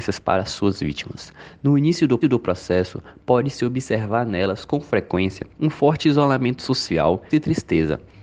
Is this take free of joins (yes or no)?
no